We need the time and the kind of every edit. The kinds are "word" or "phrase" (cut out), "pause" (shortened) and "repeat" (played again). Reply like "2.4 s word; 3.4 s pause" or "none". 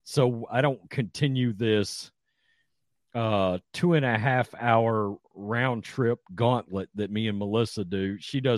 5.2 s pause